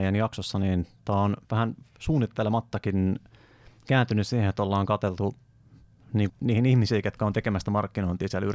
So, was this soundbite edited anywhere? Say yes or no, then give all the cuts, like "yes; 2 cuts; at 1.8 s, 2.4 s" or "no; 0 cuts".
yes; 2 cuts; at 1.4 s, 6.3 s